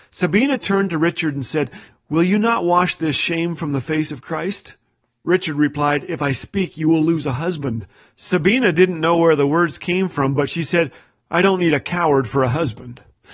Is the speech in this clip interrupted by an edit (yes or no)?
no